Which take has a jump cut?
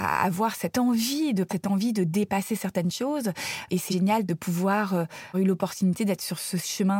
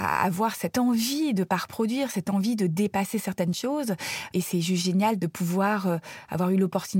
first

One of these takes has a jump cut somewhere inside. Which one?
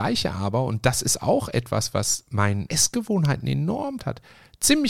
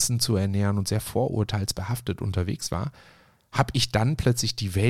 first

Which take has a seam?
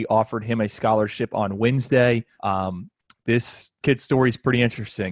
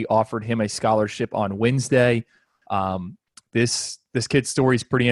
first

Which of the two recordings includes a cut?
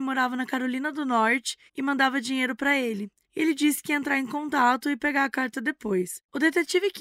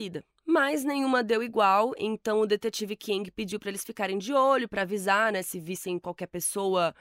first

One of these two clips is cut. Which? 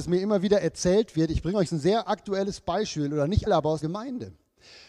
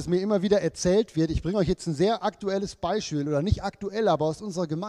first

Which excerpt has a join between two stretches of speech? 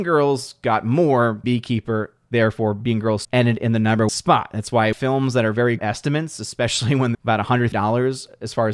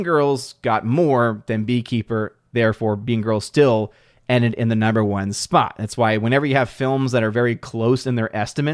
first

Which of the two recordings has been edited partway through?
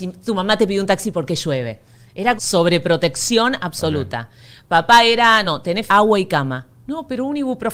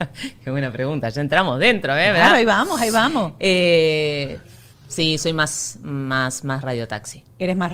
first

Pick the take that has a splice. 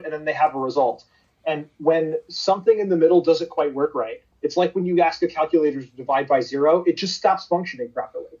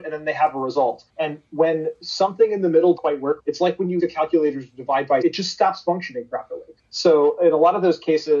second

